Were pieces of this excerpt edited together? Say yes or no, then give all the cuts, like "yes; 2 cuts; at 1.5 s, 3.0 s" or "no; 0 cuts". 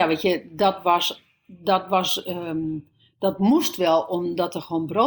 no; 0 cuts